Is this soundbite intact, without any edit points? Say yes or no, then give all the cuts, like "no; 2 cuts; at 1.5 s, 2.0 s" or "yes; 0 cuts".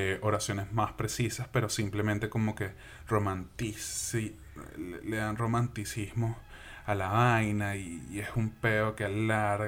yes; 0 cuts